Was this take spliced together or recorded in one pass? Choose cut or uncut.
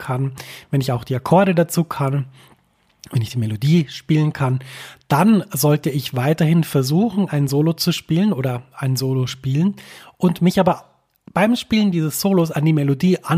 uncut